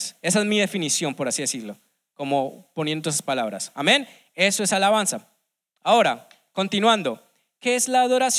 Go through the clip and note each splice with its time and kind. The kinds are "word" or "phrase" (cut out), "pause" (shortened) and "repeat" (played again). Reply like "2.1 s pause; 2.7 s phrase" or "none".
none

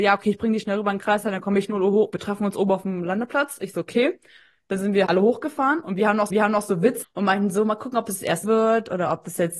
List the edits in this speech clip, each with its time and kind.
5.1 s word; 6.3 s repeat; 7.0 s word; 8.4 s word

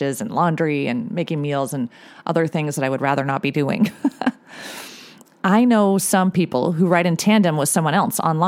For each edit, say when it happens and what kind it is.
none

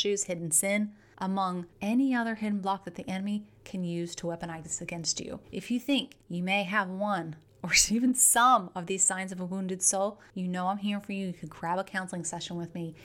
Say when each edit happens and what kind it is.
1.7 s pause; 5.4 s pause

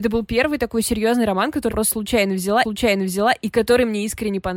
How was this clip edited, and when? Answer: 1.7 s word; 2.6 s repeat

